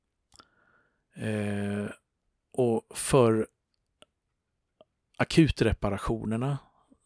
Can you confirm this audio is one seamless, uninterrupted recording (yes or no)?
yes